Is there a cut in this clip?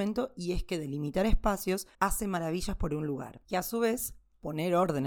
yes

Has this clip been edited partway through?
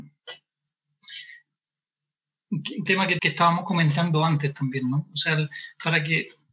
yes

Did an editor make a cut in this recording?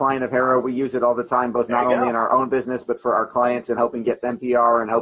no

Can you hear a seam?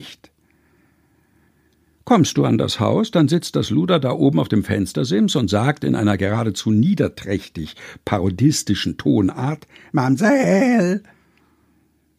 no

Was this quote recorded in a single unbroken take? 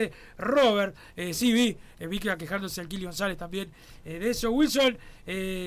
yes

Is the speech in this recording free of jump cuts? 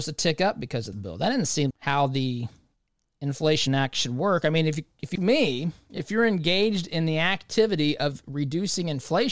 no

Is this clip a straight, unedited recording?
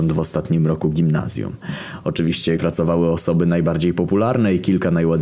no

